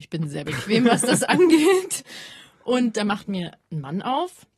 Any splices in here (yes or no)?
no